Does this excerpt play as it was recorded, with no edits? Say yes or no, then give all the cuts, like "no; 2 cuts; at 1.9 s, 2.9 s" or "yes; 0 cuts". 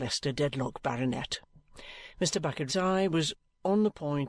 no; 1 cut; at 2.7 s